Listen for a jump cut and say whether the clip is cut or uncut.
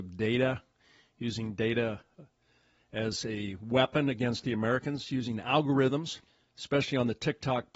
uncut